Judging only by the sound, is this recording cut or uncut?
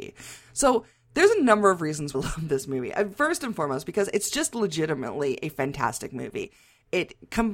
cut